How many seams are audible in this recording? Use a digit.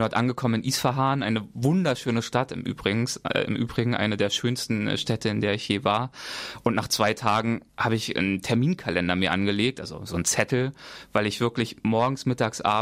1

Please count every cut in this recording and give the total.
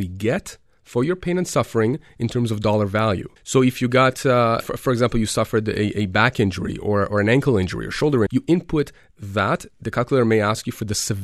3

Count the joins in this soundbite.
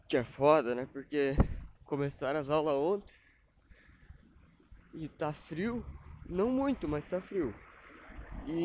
1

